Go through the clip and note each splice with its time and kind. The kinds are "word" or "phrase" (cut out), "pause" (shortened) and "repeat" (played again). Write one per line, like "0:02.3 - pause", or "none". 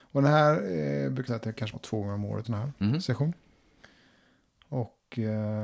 0:01.3 - word
0:01.7 - word
0:02.4 - word